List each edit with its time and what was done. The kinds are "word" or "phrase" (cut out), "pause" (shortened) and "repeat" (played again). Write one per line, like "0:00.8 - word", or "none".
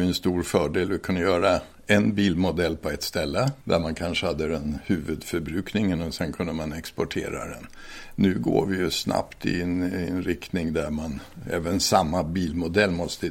0:03.6 - pause